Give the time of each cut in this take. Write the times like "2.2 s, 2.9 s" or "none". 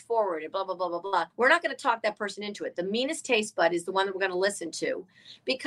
1.3 s